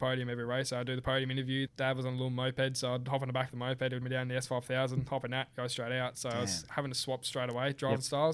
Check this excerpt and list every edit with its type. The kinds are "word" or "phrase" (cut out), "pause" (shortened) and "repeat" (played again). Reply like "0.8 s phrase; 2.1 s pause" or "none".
1.7 s word; 4.0 s word